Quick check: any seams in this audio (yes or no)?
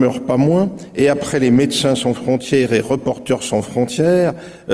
no